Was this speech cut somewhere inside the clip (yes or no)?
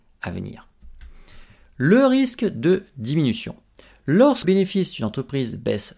yes